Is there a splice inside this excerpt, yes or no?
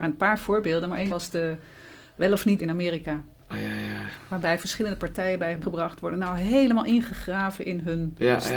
yes